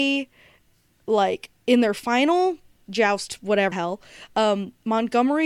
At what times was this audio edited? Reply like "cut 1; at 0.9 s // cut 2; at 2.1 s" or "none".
cut 1; at 2.9 s // cut 2; at 3.7 s